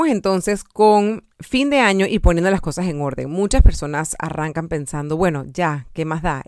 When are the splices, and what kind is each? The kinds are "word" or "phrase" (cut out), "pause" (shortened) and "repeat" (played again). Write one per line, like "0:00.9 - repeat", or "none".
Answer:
0:01.3 - pause